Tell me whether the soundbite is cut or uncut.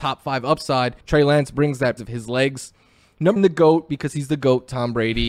cut